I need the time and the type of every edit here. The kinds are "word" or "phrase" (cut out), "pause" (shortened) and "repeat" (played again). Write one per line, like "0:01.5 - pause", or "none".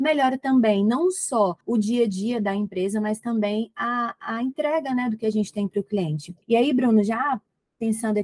0:01.6 - pause
0:06.4 - pause